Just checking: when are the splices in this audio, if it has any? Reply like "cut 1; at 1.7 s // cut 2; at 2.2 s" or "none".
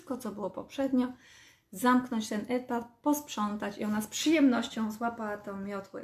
none